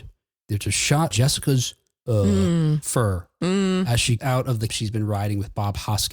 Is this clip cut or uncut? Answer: cut